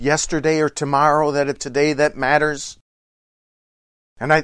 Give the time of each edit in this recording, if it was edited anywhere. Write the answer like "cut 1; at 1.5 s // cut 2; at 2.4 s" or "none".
cut 1; at 1.6 s